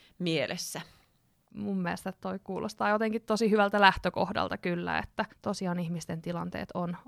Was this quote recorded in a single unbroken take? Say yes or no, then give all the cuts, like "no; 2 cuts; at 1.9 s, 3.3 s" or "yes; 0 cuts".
no; 2 cuts; at 1.3 s, 5.3 s